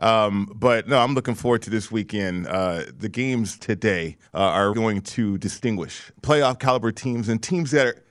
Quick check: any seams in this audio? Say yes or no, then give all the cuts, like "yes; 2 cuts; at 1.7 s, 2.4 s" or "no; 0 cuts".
yes; 3 cuts; at 4.3 s, 4.7 s, 6.1 s